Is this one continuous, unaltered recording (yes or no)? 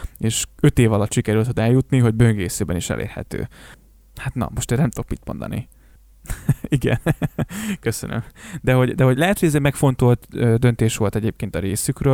yes